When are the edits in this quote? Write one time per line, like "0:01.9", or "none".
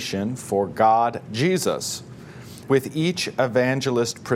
0:01.3
0:02.7